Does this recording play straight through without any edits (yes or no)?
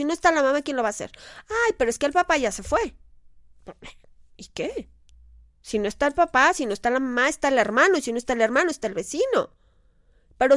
yes